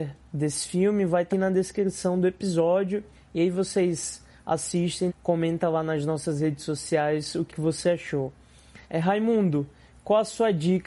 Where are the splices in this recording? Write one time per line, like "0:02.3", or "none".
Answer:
0:01.3
0:03.1
0:05.1
0:07.5
0:08.8

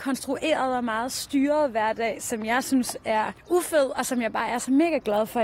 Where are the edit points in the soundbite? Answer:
0:03.4

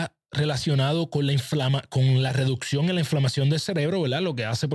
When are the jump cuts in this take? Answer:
none

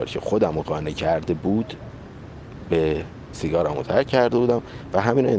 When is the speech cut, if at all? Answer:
0:03.3

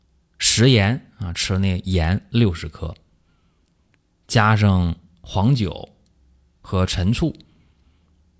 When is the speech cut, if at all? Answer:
none

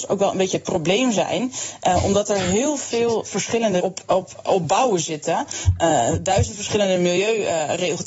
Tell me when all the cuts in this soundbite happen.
0:03.8

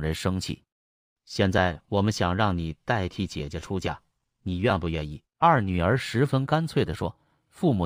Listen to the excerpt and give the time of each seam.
0:05.3

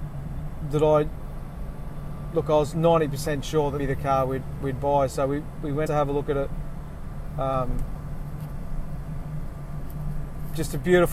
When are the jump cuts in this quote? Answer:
0:03.8
0:05.9

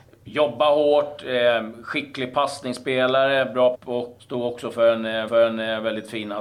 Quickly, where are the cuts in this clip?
0:03.7
0:04.2
0:05.3

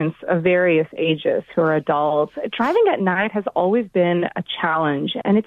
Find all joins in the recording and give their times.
none

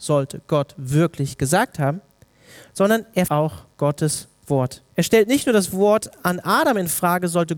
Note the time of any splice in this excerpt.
0:03.3
0:04.9

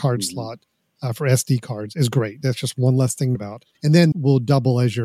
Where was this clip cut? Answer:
0:03.3
0:03.7
0:04.1

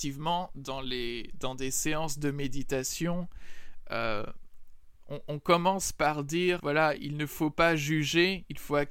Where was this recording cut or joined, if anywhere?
0:06.6

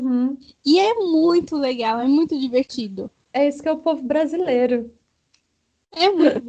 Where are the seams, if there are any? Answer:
none

